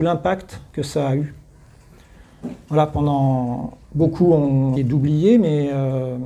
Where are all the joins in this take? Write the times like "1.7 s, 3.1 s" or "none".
3.8 s, 4.8 s